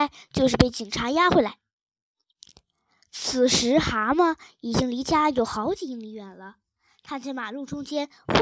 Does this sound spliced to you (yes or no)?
no